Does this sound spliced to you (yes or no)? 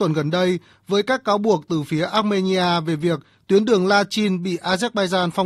no